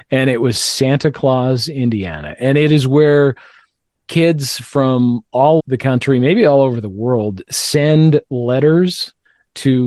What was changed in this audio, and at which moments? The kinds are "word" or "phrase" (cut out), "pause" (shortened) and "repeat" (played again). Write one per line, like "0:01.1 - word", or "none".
0:05.6 - word